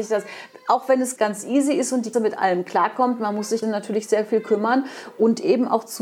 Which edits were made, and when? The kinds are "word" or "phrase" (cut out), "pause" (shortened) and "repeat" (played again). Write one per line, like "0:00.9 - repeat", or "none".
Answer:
0:01.2 - word
0:02.1 - word
0:03.6 - word